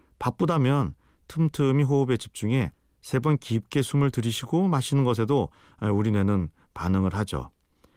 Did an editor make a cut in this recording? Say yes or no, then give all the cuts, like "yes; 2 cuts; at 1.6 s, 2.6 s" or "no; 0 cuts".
no; 0 cuts